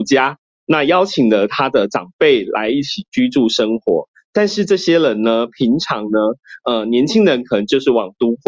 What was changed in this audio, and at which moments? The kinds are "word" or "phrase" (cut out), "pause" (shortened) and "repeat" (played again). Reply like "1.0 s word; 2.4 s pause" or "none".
none